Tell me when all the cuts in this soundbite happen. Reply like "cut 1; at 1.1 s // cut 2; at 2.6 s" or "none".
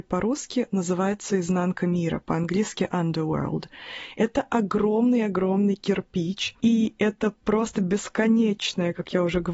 none

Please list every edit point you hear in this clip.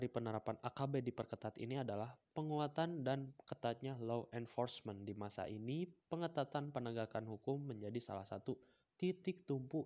cut 1; at 6.0 s

